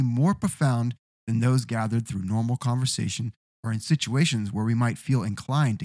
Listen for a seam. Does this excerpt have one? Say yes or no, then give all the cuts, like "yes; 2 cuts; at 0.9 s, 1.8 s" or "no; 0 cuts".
no; 0 cuts